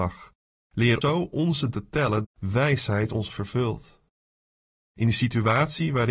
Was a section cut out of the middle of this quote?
yes; 4 cuts; at 1.0 s, 1.7 s, 2.2 s, 3.3 s

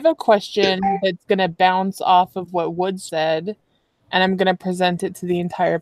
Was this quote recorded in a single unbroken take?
no; 1 cut; at 3.1 s

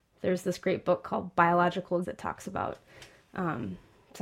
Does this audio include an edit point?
yes; 1 cut; at 2.0 s

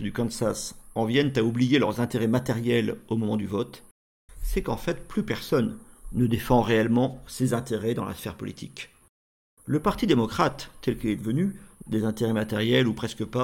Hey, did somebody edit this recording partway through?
yes; 1 cut; at 11.8 s

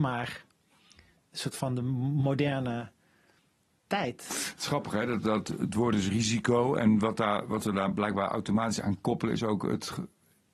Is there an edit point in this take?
no; 0 cuts

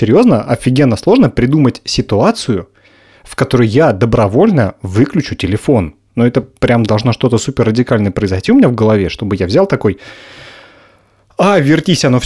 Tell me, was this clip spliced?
no; 0 cuts

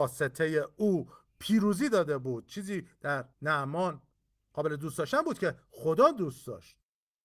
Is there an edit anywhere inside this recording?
yes; 1 cut; at 3.3 s

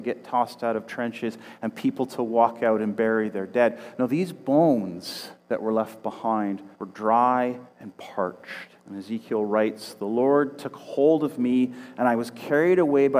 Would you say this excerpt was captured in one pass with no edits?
no; 4 cuts; at 5.4 s, 6.7 s, 7.7 s, 8.8 s

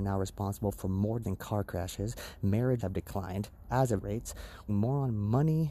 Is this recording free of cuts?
no; 4 cuts; at 1.2 s, 2.8 s, 4.0 s, 4.7 s

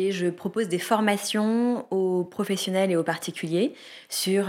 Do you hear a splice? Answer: no; 0 cuts

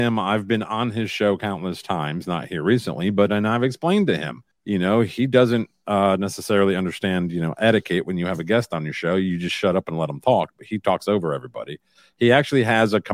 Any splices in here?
yes; 1 cut; at 4.5 s

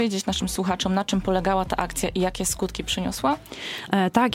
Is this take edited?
no; 0 cuts

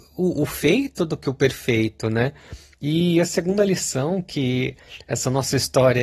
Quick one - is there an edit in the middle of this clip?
no; 0 cuts

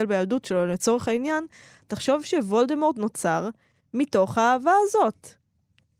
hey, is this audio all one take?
yes; 0 cuts

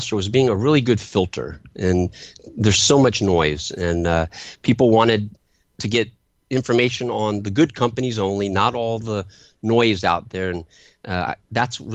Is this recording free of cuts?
yes; 0 cuts

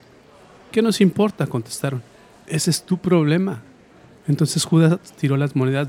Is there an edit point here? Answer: no; 0 cuts

